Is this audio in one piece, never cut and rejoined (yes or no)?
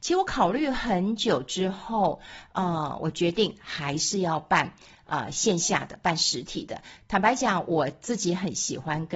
yes